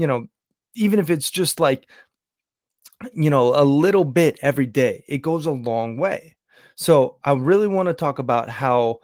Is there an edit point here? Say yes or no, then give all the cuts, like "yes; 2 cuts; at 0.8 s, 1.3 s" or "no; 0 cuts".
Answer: no; 0 cuts